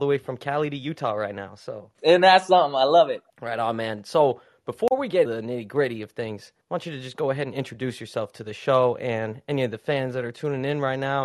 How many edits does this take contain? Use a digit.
4